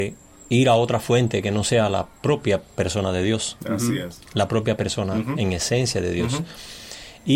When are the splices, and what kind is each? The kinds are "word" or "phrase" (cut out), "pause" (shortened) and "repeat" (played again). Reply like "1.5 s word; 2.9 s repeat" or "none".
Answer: none